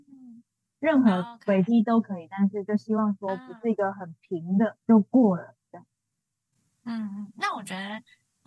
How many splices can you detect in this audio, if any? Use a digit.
1